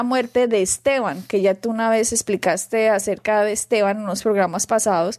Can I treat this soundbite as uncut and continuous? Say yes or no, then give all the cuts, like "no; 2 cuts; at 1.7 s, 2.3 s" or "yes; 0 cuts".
yes; 0 cuts